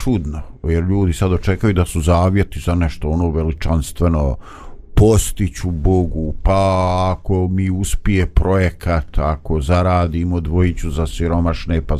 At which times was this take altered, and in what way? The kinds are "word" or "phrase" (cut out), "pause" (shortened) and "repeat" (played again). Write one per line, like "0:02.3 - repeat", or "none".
none